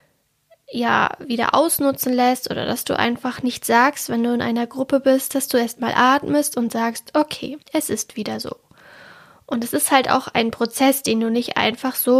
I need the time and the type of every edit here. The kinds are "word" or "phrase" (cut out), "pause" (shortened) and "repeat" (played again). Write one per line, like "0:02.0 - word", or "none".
0:07.6 - pause